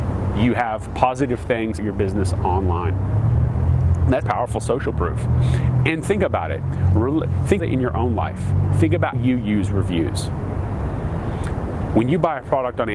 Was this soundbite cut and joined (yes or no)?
yes